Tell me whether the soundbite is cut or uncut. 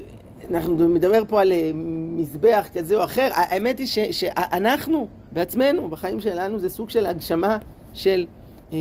cut